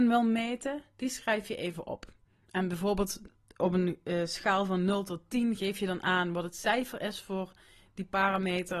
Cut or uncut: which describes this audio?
uncut